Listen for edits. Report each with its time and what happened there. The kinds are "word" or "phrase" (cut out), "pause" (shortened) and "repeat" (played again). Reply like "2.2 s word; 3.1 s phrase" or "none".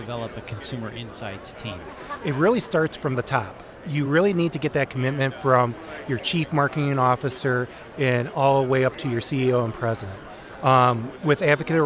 none